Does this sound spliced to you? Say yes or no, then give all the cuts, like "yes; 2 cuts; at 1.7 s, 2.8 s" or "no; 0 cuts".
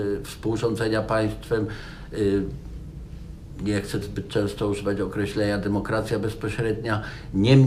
yes; 1 cut; at 4.0 s